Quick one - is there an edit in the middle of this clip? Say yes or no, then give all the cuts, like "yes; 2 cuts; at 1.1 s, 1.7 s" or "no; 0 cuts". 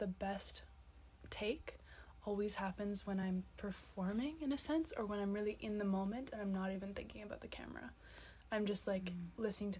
no; 0 cuts